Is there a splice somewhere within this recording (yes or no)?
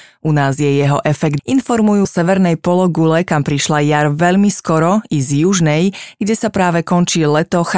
yes